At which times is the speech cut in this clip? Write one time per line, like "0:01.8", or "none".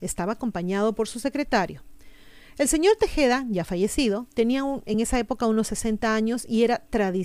none